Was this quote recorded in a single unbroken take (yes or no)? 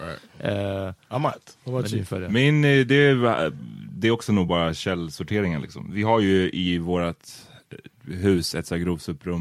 yes